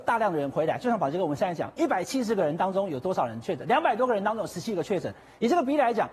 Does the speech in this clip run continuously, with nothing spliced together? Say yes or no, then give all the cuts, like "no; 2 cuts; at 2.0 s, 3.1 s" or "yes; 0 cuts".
yes; 0 cuts